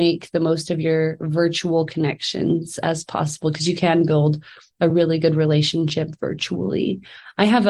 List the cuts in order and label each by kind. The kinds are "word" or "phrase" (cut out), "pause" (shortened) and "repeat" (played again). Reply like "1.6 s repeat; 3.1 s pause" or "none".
none